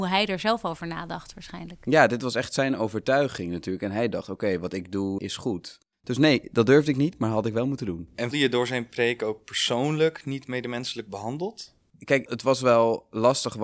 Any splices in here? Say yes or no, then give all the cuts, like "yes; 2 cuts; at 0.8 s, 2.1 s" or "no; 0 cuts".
yes; 2 cuts; at 5.2 s, 8.3 s